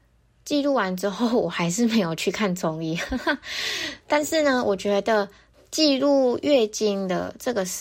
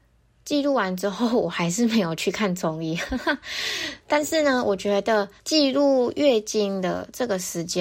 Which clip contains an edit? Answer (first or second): second